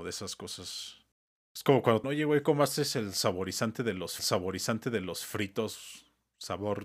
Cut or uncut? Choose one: cut